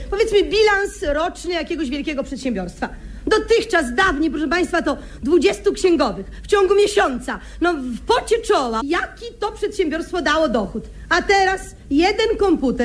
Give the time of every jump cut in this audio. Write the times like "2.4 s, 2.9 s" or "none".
8.8 s